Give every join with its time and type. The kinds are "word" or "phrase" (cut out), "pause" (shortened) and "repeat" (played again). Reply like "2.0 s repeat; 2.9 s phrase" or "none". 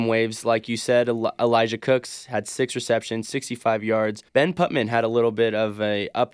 4.3 s pause